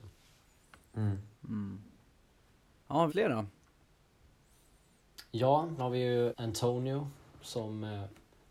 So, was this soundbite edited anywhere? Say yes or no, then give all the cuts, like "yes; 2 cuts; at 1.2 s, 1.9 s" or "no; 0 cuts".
yes; 4 cuts; at 1.3 s, 3.1 s, 5.8 s, 6.3 s